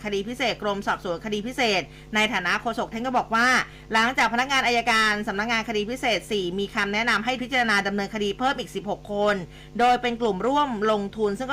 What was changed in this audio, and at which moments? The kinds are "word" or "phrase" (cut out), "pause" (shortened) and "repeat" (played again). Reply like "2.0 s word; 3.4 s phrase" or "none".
2.9 s word; 7.4 s word